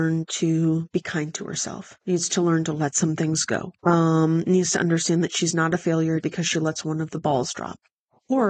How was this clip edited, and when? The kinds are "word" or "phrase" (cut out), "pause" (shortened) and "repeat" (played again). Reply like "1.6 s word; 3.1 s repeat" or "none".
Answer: 2.0 s pause; 3.8 s pause; 6.2 s word